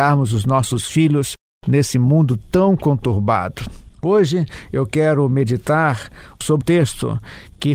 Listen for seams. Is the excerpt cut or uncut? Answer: cut